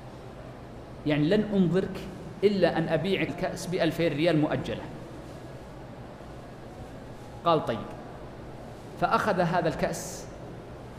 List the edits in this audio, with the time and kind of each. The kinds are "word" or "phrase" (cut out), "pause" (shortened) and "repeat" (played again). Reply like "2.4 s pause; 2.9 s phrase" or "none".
3.3 s word